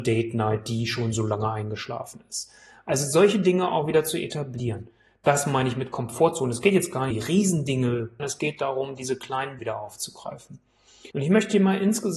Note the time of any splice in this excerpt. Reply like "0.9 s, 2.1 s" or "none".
7.1 s, 8.2 s, 9.6 s, 11.1 s